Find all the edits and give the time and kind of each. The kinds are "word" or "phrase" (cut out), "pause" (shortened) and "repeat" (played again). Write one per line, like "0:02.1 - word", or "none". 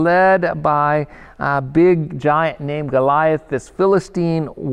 none